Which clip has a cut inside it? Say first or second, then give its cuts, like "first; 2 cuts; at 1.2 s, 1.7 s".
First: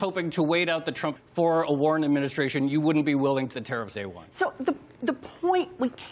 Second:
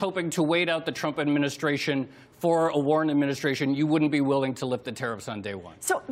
first; 3 cuts; at 1.2 s, 3.5 s, 3.9 s